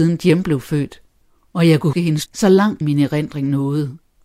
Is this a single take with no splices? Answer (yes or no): no